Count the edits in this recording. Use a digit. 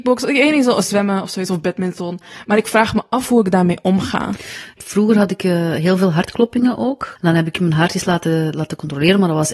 0